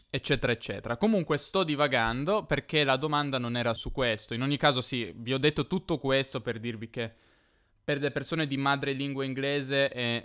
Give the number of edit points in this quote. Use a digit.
1